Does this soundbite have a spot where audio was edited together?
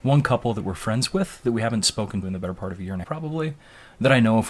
yes; 2 cuts; at 2.2 s, 3.0 s

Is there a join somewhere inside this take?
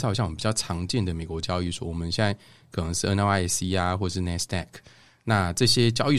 no; 0 cuts

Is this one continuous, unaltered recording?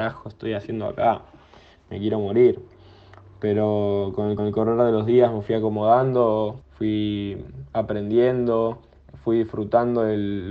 no; 2 cuts; at 4.4 s, 6.6 s

